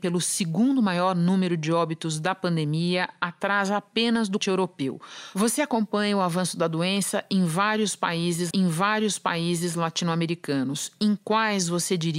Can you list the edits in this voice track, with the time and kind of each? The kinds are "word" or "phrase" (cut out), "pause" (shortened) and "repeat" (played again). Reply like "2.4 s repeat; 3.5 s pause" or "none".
4.4 s word; 8.5 s repeat

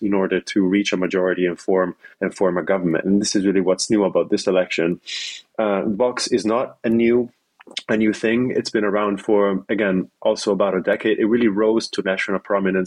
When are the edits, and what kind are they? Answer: 2.1 s pause

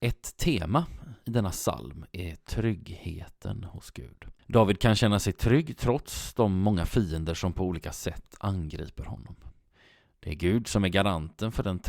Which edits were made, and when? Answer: none

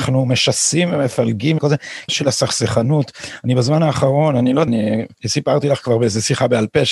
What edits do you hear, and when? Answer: 1.6 s word; 2.1 s phrase; 4.7 s phrase; 5.1 s pause

